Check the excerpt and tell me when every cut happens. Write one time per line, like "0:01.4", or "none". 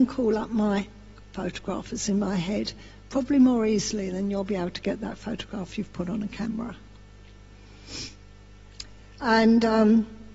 none